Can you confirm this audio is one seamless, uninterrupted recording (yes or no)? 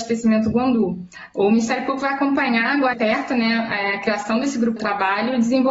no